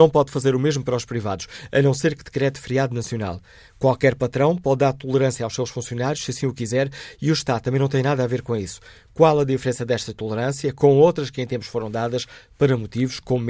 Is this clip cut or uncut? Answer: uncut